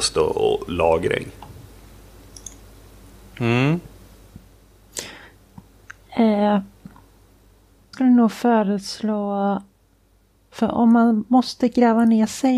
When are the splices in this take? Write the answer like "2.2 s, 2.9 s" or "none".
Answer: 7.9 s

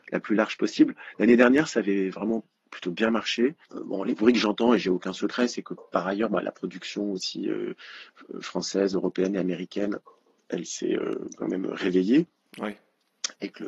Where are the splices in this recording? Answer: none

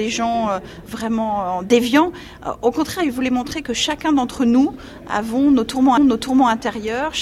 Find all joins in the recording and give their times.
6.0 s

